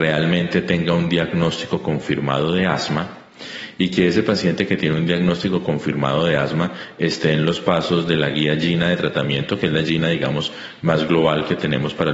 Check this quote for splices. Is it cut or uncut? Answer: uncut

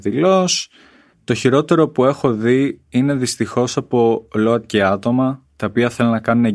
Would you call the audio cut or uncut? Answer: cut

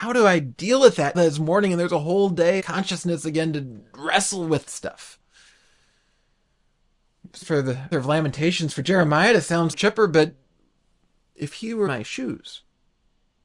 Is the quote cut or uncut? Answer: cut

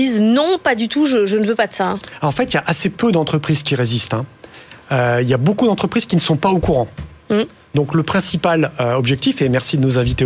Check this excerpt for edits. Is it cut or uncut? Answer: uncut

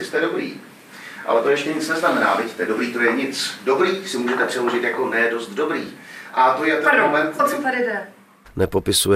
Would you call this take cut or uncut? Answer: uncut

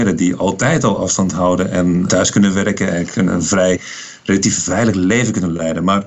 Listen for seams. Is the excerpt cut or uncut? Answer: cut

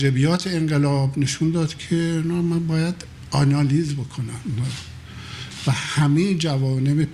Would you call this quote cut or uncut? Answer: uncut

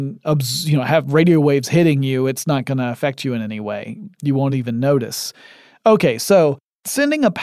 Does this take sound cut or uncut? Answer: uncut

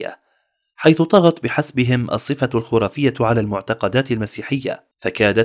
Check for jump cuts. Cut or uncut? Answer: uncut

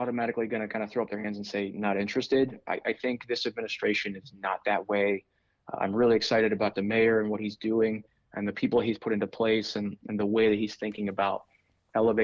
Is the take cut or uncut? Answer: uncut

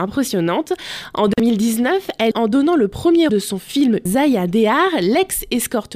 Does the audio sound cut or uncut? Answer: cut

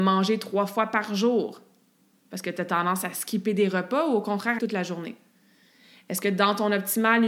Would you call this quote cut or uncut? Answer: cut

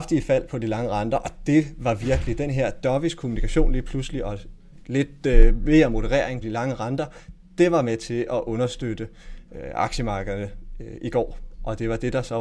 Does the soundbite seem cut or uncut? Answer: cut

